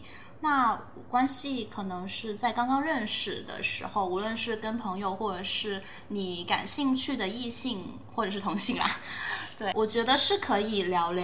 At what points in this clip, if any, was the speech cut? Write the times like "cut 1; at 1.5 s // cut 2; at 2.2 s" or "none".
cut 1; at 9.7 s